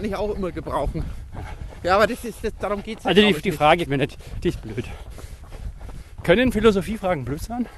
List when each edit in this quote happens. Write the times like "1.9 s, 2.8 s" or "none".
2.1 s, 3.9 s